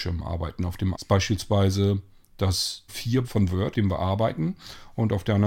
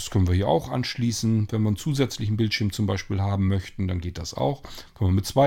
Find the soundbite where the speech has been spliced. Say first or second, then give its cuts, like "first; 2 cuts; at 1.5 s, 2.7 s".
first; 4 cuts; at 0.9 s, 2.9 s, 3.2 s, 3.7 s